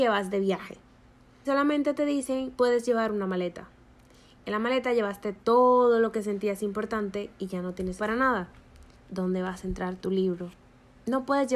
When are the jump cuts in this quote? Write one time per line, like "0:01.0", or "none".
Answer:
0:01.4
0:08.0
0:08.9